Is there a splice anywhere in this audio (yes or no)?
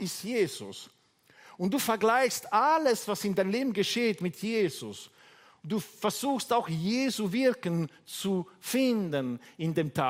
no